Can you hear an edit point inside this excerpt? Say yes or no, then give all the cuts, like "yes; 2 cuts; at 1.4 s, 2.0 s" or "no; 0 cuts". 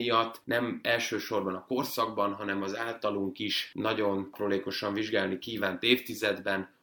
no; 0 cuts